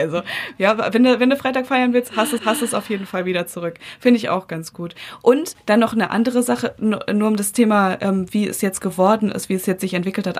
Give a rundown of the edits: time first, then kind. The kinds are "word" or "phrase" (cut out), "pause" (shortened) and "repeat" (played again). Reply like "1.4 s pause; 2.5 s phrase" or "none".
2.4 s repeat; 5.5 s word